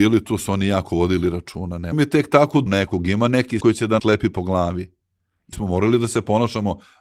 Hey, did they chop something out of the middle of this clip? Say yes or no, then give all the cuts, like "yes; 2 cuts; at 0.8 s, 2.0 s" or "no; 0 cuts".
yes; 5 cuts; at 1.9 s, 2.7 s, 3.6 s, 4.0 s, 5.5 s